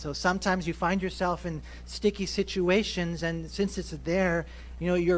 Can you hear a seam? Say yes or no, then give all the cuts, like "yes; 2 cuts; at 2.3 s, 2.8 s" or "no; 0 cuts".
no; 0 cuts